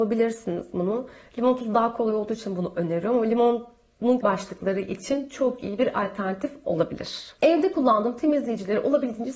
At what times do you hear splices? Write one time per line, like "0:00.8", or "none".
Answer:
0:04.2